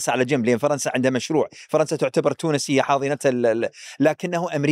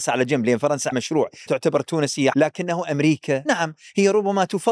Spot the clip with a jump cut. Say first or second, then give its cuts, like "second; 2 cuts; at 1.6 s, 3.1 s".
second; 4 cuts; at 0.9 s, 1.5 s, 2.3 s, 3.5 s